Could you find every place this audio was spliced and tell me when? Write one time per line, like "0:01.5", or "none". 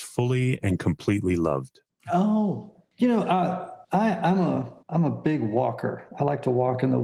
0:01.9
0:03.8
0:04.8